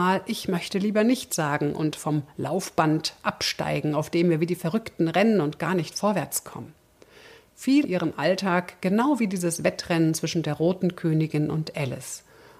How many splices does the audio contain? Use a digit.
1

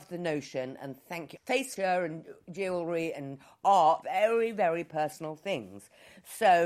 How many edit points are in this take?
3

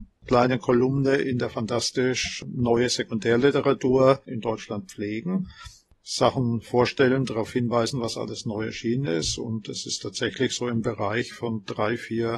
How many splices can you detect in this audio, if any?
1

